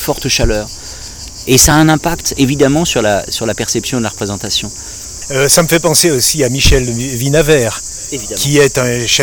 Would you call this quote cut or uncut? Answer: uncut